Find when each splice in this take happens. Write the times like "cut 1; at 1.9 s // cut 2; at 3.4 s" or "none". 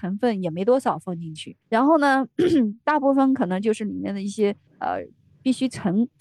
cut 1; at 1.6 s // cut 2; at 4.7 s